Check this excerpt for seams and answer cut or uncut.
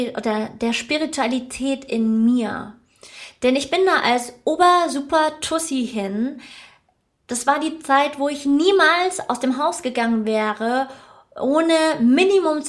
uncut